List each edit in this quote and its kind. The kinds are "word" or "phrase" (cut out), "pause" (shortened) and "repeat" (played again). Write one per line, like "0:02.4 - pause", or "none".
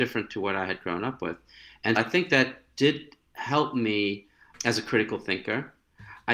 0:02.0 - word